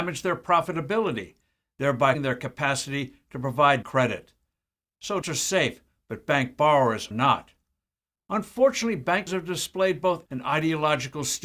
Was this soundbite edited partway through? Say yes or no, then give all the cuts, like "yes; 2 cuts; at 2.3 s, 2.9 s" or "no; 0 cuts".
yes; 6 cuts; at 2.1 s, 3.8 s, 5.2 s, 7.1 s, 9.3 s, 10.3 s